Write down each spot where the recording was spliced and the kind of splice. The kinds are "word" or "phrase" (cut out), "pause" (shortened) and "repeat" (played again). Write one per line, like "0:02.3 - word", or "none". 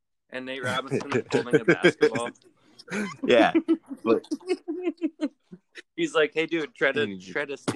none